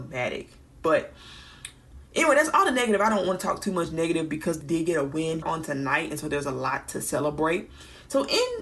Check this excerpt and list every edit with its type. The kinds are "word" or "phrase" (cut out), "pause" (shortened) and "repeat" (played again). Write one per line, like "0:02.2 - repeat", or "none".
0:02.1 - pause
0:04.6 - word
0:05.4 - word